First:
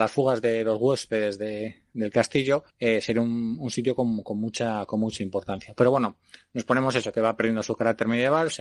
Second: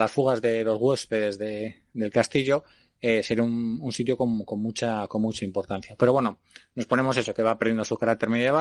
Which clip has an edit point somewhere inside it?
first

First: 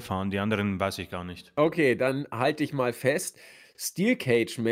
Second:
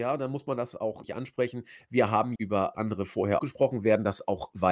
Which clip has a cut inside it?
second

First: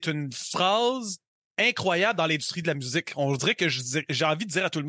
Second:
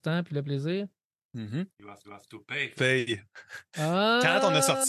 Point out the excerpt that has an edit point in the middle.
second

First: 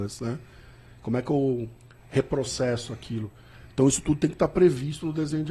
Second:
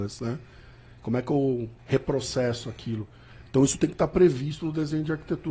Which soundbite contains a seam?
second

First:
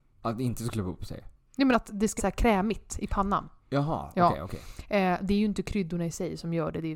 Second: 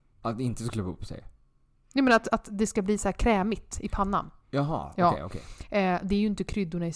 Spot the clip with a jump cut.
first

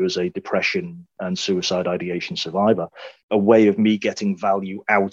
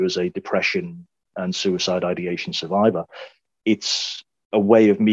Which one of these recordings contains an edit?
first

